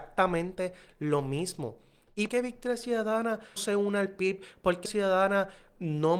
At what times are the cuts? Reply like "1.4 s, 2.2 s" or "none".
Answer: 2.3 s, 3.6 s, 4.9 s